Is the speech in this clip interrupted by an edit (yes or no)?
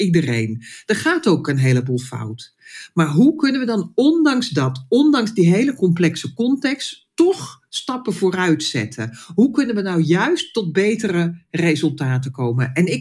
no